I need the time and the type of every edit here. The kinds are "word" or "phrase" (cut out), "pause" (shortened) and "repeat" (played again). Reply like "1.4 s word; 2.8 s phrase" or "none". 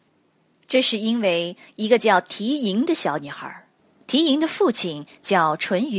3.8 s pause